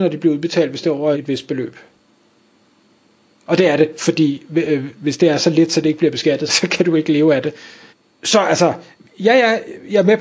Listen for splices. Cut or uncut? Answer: cut